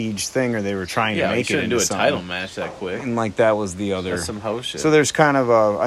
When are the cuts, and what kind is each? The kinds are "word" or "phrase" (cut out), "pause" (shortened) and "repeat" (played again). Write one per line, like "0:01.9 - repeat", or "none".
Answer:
none